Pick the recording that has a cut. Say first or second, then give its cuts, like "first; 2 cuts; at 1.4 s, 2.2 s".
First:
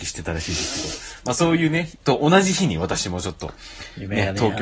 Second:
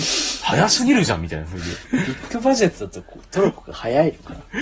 first; 1 cut; at 2.0 s